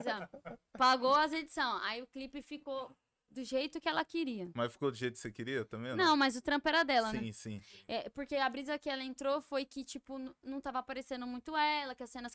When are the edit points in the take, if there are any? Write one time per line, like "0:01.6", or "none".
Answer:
none